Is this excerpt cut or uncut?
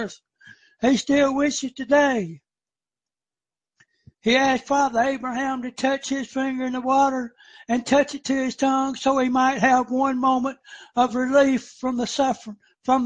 uncut